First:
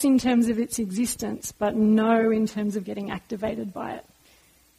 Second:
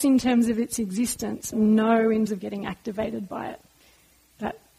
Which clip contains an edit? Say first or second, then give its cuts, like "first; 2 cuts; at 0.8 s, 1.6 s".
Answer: second; 2 cuts; at 1.5 s, 2.3 s